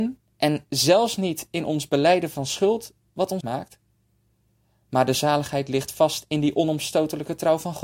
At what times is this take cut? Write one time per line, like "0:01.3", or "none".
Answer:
0:03.4